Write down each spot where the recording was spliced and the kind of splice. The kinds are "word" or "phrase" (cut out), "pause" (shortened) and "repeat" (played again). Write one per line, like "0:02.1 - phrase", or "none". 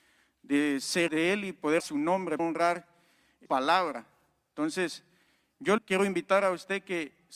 0:01.1 - word
0:01.8 - word
0:02.4 - word
0:03.5 - word
0:05.8 - word